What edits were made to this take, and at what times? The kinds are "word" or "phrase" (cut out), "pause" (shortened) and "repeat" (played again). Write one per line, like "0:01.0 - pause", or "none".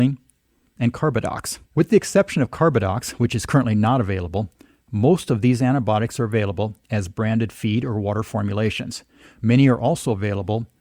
0:01.7 - pause